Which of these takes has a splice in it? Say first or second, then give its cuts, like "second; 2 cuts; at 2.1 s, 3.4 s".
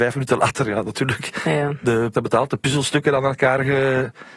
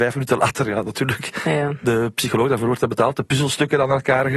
first; 1 cut; at 2.1 s